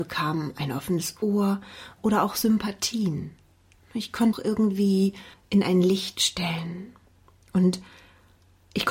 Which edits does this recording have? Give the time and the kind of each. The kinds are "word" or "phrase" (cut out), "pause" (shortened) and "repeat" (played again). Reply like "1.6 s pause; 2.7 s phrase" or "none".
4.3 s phrase; 5.3 s pause; 7.1 s pause